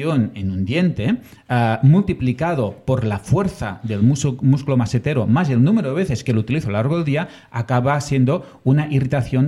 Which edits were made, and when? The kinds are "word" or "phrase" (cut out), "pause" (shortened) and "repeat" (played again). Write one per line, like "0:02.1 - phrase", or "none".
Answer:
none

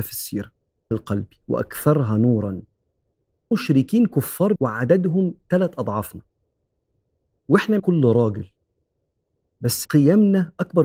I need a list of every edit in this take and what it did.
0:00.9 - word
0:03.5 - word
0:04.6 - word
0:07.8 - word
0:09.8 - word

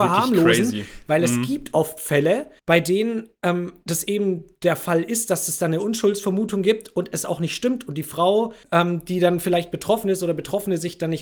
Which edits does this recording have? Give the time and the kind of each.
0:02.6 - pause
0:08.6 - pause

